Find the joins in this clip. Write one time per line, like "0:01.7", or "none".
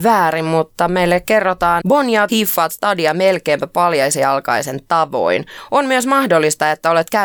0:01.8
0:02.3